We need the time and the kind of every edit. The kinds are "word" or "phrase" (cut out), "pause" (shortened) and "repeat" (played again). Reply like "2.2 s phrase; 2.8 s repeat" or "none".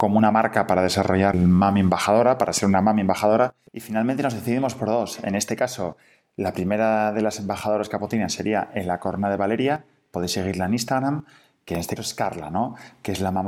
1.3 s word; 12.0 s word

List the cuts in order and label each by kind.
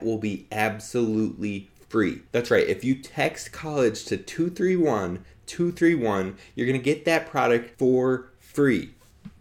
2.3 s pause; 7.7 s pause

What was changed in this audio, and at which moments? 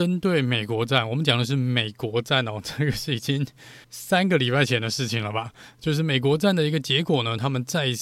3.8 s pause

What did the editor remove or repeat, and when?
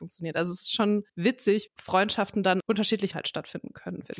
1.7 s word; 2.6 s phrase; 3.1 s word

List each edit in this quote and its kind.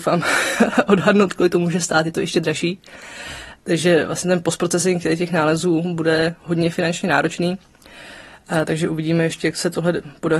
none

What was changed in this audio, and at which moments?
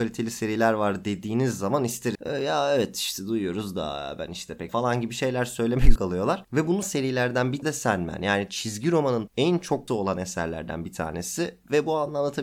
2.1 s word; 4.7 s word; 6.0 s word; 6.8 s word; 7.6 s word; 9.3 s word; 9.9 s word

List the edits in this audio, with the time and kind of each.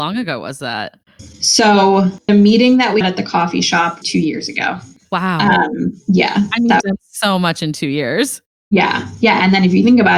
2.3 s word; 3.0 s word; 4.0 s word; 6.8 s word

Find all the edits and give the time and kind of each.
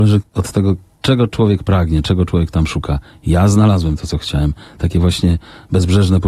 none

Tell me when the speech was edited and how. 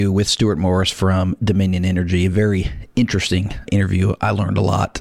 3.7 s word

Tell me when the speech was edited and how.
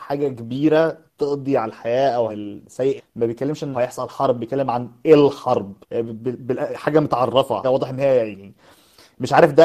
1.1 s pause; 2.3 s phrase; 3.0 s word; 3.7 s phrase; 5.8 s pause; 7.6 s word

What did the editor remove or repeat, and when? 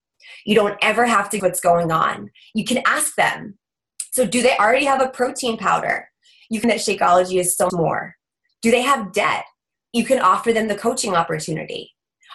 1.4 s word; 6.6 s word; 7.7 s word

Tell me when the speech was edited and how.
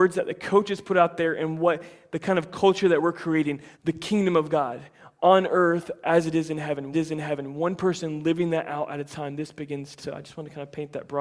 3.7 s pause; 6.9 s repeat; 10.0 s word

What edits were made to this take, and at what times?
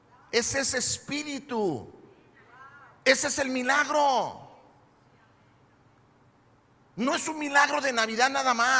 none

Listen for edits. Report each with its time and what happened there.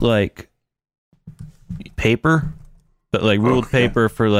1.9 s word

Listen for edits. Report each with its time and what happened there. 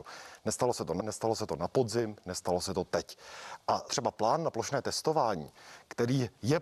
1.0 s word; 3.9 s word

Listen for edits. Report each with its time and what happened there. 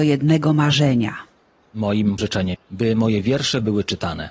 2.2 s word; 2.5 s word

